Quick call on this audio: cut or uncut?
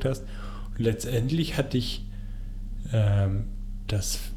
uncut